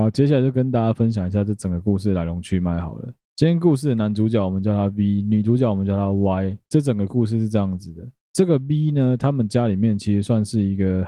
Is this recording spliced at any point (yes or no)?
no